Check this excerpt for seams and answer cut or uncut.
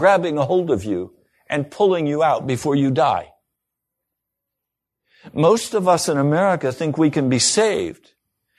uncut